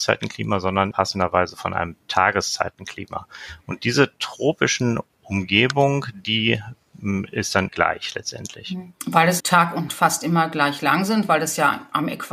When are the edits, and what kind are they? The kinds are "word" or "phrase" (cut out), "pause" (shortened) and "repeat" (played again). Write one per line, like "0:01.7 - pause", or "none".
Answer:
0:00.9 - word
0:07.7 - word
0:09.4 - word
0:09.9 - word